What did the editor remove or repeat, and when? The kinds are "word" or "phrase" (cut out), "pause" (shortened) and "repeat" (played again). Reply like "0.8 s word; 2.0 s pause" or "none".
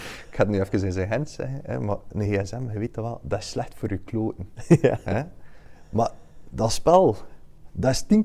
none

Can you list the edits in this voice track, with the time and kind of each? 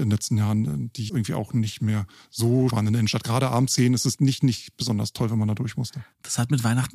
1.1 s word; 2.7 s phrase; 3.7 s word; 4.2 s word

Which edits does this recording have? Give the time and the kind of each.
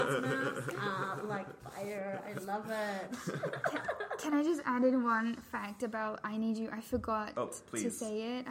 none

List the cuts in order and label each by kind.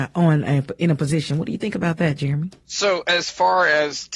2.6 s pause

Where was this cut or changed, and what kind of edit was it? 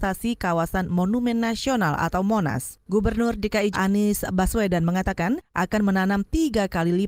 2.8 s pause; 3.7 s word

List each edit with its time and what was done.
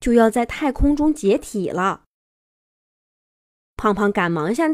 none

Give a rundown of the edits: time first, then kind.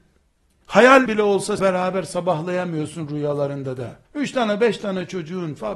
1.1 s word; 1.6 s word; 4.0 s pause

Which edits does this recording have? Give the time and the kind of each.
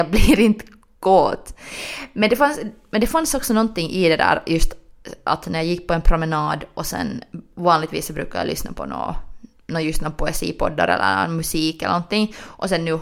none

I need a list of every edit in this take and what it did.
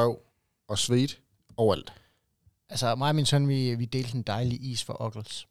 1.4 s pause

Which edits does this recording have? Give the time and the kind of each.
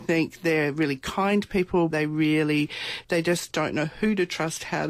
1.9 s word

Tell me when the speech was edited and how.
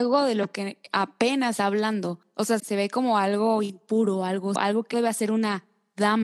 1.6 s word; 2.6 s word; 4.6 s word; 4.9 s word

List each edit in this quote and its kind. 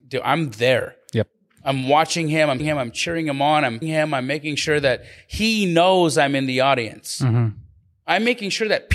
2.6 s word; 3.8 s word

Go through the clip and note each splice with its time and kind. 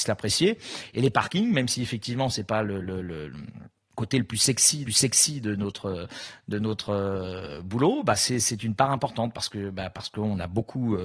4.9 s repeat

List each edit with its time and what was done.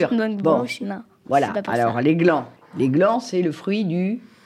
2.6 s pause

